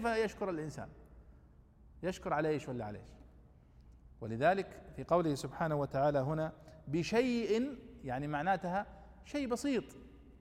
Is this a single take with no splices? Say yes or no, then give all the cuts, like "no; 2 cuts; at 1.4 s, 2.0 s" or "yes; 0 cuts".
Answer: yes; 0 cuts